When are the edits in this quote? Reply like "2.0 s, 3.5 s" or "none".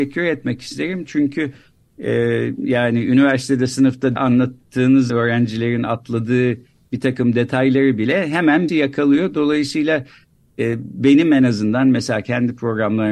4.2 s, 5.1 s, 8.7 s